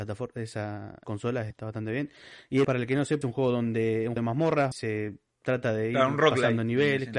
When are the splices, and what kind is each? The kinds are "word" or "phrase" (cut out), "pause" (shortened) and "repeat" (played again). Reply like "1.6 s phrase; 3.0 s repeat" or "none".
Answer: 1.0 s word; 1.5 s word; 2.6 s word; 3.2 s word; 4.2 s word; 4.7 s word